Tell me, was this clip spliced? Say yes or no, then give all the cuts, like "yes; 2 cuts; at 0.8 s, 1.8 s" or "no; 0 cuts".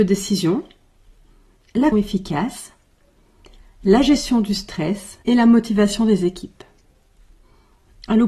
yes; 2 cuts; at 1.9 s, 5.2 s